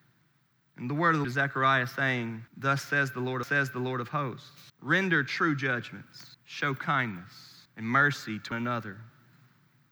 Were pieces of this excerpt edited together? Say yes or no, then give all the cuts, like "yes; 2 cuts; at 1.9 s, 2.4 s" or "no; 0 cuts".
yes; 7 cuts; at 1.2 s, 2.5 s, 3.4 s, 4.7 s, 6.3 s, 7.7 s, 8.5 s